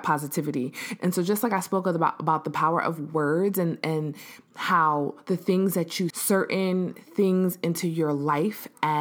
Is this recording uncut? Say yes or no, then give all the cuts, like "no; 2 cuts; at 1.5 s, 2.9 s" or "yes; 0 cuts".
no; 1 cut; at 6.1 s